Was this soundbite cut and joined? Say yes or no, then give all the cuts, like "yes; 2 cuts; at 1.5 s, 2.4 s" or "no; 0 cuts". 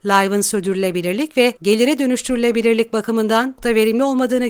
yes; 2 cuts; at 1.6 s, 3.6 s